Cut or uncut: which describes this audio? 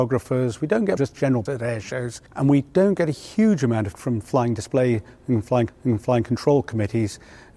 cut